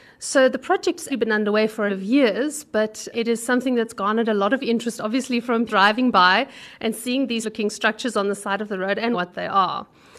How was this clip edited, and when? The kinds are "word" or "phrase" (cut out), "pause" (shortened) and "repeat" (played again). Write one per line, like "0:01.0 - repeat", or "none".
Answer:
0:01.1 - word
0:01.9 - word
0:03.1 - word
0:05.7 - word
0:07.4 - word
0:09.1 - word